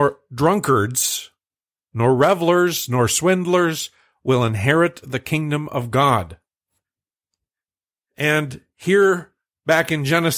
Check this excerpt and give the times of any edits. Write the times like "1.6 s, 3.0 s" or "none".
none